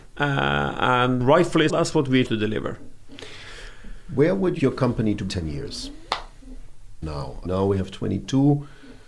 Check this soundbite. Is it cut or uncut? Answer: cut